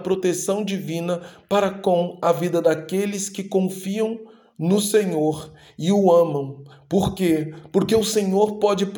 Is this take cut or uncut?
uncut